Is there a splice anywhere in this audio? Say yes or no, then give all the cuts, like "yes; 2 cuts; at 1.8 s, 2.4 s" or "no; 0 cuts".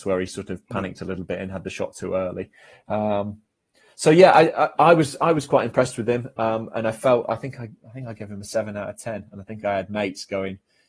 no; 0 cuts